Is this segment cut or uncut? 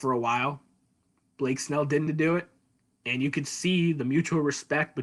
cut